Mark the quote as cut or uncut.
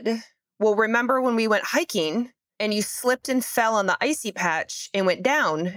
uncut